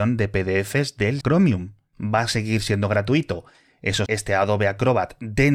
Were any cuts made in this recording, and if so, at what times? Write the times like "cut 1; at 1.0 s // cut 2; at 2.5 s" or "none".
cut 1; at 1.2 s // cut 2; at 4.1 s